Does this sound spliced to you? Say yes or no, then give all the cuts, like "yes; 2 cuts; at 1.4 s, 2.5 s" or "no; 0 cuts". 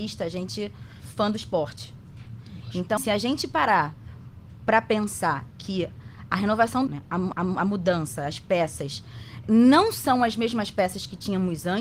yes; 5 cuts; at 1.0 s, 3.0 s, 6.9 s, 7.3 s, 9.4 s